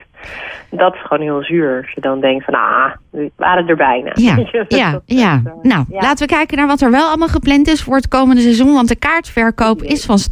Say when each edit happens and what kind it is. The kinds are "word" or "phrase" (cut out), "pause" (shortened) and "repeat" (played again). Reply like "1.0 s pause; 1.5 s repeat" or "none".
none